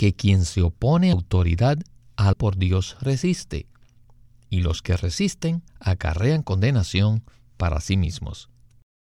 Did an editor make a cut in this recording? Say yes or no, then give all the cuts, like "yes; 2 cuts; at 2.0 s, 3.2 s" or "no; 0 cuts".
yes; 3 cuts; at 1.1 s, 2.3 s, 5.7 s